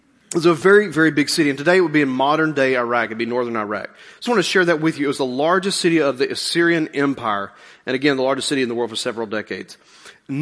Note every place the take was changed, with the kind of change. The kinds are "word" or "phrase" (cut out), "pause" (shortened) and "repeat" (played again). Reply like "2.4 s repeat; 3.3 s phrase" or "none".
4.3 s word